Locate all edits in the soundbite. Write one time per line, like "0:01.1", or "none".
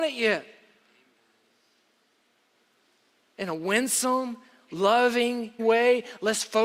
0:05.6